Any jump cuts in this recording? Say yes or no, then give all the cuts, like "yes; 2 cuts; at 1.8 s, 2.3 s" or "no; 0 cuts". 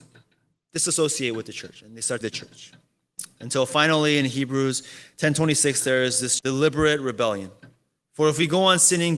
yes; 2 cuts; at 2.2 s, 6.4 s